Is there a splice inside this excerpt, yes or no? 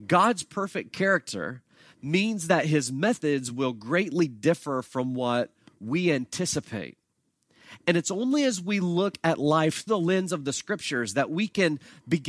yes